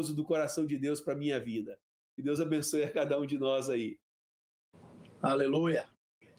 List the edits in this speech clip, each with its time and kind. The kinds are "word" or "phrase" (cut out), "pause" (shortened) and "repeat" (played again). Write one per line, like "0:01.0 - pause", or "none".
none